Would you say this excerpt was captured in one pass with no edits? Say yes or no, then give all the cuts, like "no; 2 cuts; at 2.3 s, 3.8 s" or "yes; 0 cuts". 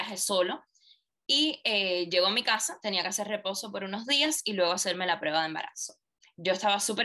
yes; 0 cuts